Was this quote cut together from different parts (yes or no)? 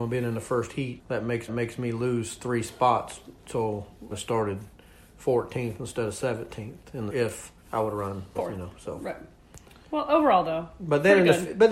yes